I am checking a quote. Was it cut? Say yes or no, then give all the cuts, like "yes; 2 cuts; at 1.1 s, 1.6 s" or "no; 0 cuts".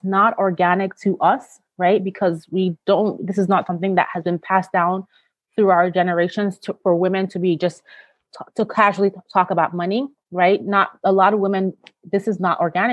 no; 0 cuts